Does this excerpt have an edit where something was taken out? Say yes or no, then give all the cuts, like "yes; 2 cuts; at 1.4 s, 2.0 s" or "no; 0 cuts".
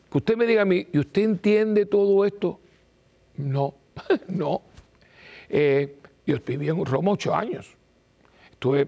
no; 0 cuts